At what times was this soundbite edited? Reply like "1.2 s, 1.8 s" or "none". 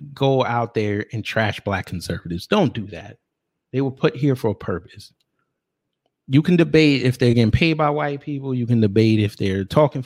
none